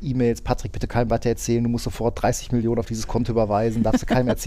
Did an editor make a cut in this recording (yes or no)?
no